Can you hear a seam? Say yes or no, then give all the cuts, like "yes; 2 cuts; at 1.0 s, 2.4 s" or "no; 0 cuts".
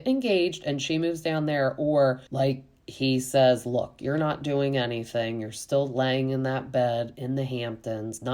yes; 1 cut; at 2.3 s